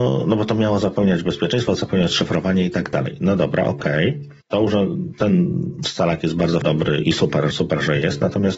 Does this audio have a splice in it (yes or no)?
yes